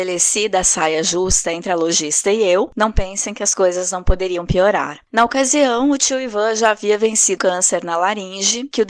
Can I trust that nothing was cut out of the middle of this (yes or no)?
no